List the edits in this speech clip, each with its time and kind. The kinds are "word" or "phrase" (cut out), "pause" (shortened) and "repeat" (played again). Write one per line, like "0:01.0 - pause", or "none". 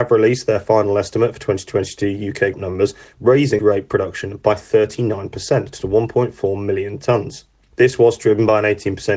0:02.5 - word
0:03.6 - word